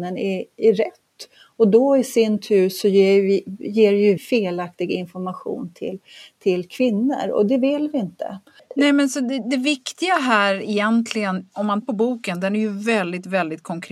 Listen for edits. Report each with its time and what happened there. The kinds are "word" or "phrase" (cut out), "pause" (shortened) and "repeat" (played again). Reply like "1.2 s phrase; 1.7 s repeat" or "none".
4.2 s word; 11.8 s word

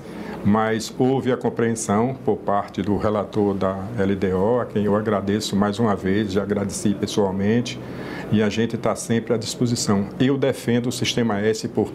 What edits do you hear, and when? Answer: none

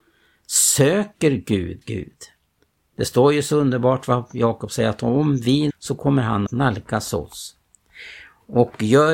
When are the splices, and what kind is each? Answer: 1.8 s word; 5.7 s phrase; 6.5 s word

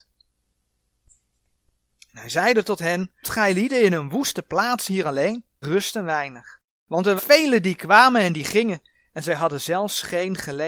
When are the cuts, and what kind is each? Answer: 3.2 s word; 5.6 s word; 7.2 s word

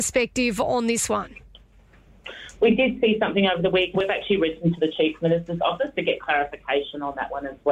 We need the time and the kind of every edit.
4.0 s word; 5.9 s word

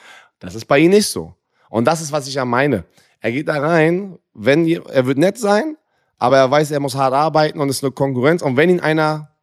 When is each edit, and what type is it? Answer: none

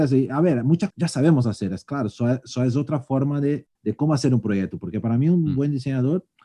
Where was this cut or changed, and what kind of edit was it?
0.9 s word; 3.7 s pause

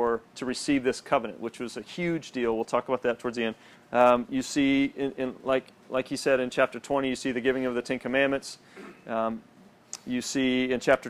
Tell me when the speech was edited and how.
3.7 s pause; 5.8 s pause

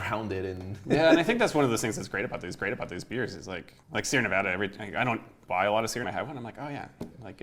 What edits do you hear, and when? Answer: 2.6 s repeat; 3.8 s pause; 6.0 s phrase

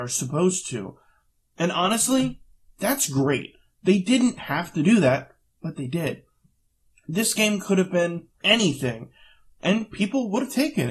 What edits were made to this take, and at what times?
8.4 s word

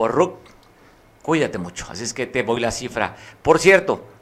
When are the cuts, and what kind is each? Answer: none

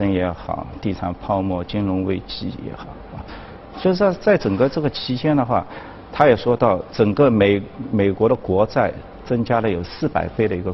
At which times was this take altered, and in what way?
none

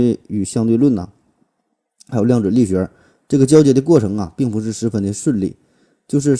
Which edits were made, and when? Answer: none

